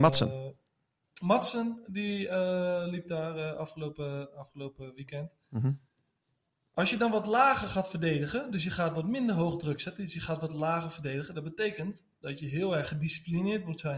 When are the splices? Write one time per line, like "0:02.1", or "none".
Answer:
none

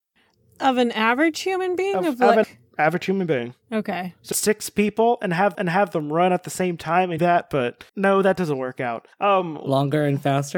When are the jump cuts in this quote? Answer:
0:02.4
0:03.6
0:04.3
0:05.5
0:07.2
0:07.9
0:09.1

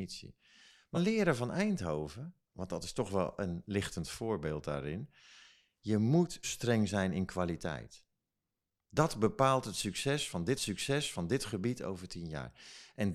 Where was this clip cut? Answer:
0:00.9
0:06.4
0:10.6

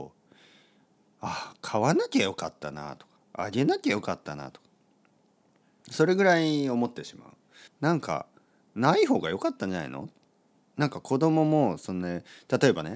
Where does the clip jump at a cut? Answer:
0:07.7

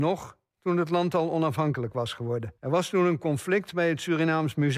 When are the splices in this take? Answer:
0:02.6

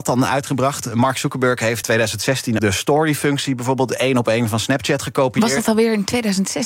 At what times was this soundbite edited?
0:01.8
0:02.6

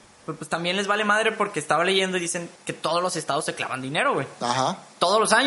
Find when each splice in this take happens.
0:02.6

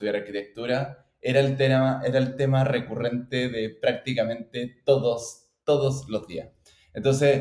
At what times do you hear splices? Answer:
none

